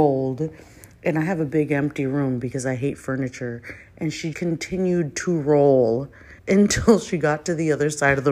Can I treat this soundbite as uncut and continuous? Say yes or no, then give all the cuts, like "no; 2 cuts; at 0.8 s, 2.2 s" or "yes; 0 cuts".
no; 2 cuts; at 4.3 s, 6.4 s